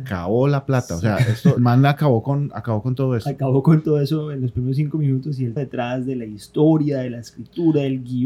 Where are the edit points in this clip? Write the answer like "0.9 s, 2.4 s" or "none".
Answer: 1.6 s, 5.6 s